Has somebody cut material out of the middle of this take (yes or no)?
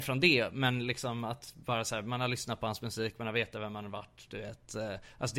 no